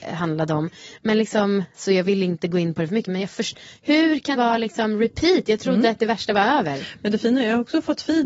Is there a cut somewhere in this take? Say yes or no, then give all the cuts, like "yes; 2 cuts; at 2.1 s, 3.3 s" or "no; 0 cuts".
yes; 1 cut; at 4.3 s